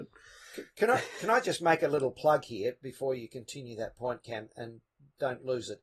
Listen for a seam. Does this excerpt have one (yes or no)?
no